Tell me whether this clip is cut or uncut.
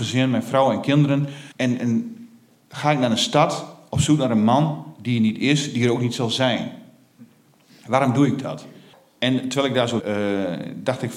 cut